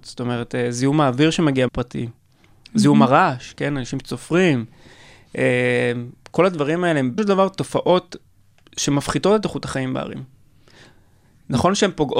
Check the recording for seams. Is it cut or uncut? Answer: cut